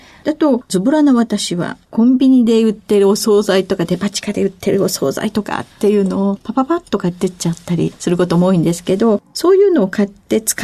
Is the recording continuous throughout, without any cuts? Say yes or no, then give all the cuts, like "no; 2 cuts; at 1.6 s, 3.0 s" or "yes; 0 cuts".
no; 1 cut; at 1.8 s